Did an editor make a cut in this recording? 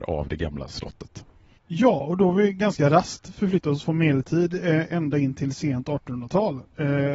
no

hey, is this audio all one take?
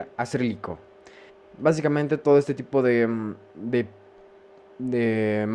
no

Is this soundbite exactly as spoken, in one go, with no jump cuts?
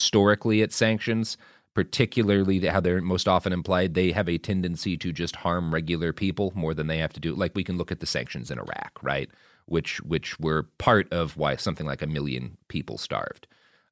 yes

